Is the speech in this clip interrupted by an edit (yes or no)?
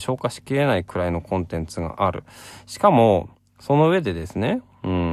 yes